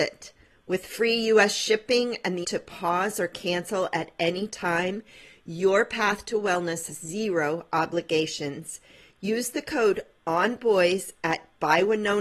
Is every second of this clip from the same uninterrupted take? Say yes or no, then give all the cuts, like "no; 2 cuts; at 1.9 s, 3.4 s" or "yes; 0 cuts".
no; 2 cuts; at 2.4 s, 6.9 s